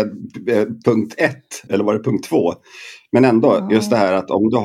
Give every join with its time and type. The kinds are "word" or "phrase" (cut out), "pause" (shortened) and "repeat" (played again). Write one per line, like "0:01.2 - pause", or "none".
0:01.7 - word